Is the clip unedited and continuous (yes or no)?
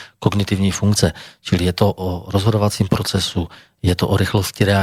yes